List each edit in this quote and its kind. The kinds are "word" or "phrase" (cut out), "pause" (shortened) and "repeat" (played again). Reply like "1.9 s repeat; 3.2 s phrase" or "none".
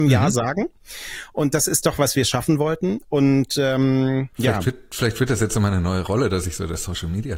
4.3 s pause